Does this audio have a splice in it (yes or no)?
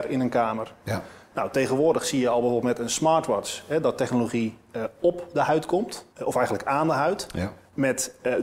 yes